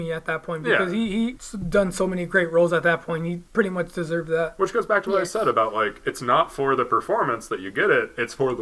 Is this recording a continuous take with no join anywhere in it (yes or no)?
no